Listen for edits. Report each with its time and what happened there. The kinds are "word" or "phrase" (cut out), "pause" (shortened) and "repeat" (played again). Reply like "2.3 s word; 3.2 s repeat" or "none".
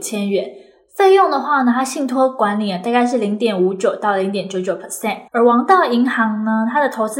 5.3 s pause